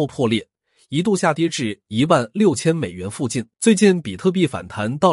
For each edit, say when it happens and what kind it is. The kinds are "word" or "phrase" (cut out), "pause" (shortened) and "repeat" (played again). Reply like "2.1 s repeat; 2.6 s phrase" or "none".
3.5 s pause